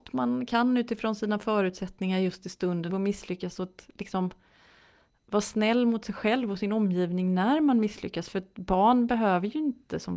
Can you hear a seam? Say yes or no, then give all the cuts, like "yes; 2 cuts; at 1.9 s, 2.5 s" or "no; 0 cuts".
yes; 1 cut; at 2.9 s